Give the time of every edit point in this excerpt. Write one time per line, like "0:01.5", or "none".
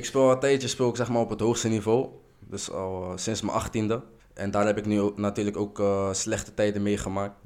0:04.2